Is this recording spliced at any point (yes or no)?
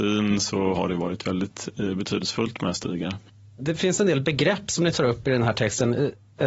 no